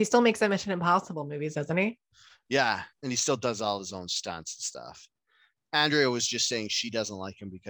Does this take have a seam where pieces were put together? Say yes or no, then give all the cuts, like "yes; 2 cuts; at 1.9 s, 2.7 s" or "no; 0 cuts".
no; 0 cuts